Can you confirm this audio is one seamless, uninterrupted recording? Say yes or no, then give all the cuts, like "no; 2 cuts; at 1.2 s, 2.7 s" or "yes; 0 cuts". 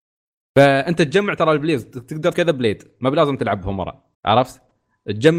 no; 2 cuts; at 2.3 s, 4.1 s